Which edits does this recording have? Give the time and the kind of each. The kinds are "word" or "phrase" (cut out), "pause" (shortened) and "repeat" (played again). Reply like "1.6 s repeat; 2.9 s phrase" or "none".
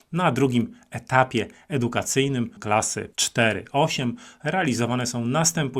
2.6 s word; 3.1 s pause